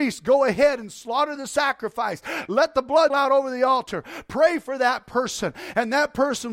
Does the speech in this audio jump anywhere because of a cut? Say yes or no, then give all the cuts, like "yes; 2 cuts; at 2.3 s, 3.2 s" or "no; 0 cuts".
yes; 1 cut; at 3.1 s